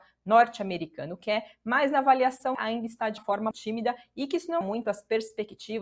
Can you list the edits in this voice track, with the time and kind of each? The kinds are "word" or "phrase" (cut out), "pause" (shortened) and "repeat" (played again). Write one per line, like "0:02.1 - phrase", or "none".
0:02.5 - word
0:03.2 - word
0:03.5 - word
0:04.6 - word

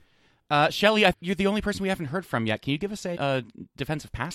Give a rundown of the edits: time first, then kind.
0:01.1 - word
0:03.1 - word

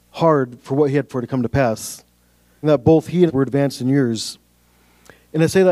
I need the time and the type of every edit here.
0:01.1 - word
0:02.6 - word
0:03.3 - word

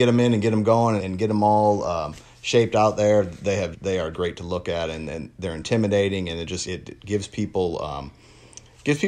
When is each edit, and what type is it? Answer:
0:01.0 - phrase
0:03.7 - word
0:04.1 - word
0:06.6 - word

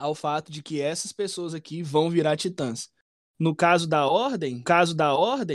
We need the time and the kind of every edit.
0:04.6 - repeat

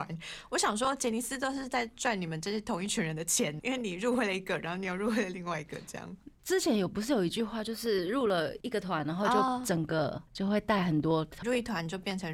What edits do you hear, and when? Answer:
0:03.6 - word
0:10.3 - pause
0:11.4 - phrase

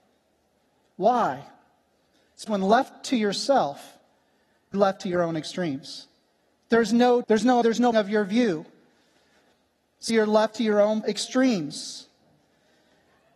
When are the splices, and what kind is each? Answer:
0:02.5 - word
0:04.7 - word
0:07.2 - word
0:07.6 - word
0:07.9 - word
0:10.1 - word
0:11.0 - word

